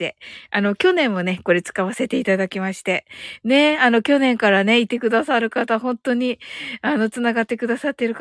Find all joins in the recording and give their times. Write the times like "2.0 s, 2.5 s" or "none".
none